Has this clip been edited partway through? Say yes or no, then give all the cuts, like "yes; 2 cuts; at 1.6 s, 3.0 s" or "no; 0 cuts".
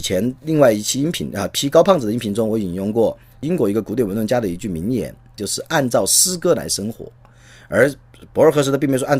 no; 0 cuts